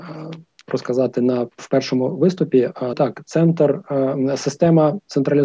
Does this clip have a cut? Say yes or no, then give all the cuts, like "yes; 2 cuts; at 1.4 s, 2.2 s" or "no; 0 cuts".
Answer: yes; 1 cut; at 2.9 s